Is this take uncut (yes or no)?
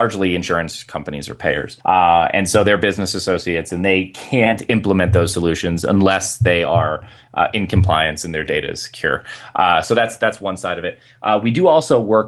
no